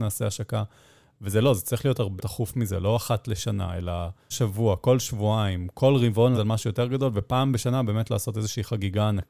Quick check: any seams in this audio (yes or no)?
yes